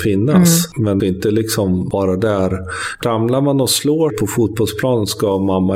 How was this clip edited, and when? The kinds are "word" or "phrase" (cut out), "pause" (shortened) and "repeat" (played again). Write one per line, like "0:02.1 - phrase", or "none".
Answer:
0:01.0 - phrase
0:03.0 - word
0:04.1 - word